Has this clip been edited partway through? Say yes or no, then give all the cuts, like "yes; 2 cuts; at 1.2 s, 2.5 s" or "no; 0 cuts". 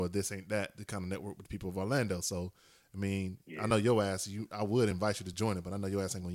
no; 0 cuts